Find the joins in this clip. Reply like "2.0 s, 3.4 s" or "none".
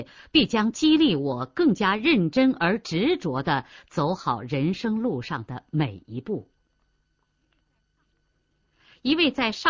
none